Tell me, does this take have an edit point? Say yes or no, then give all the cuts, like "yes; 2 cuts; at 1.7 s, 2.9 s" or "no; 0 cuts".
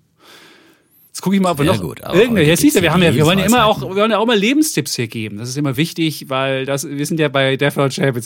no; 0 cuts